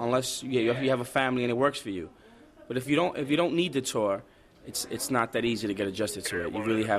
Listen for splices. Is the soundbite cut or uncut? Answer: uncut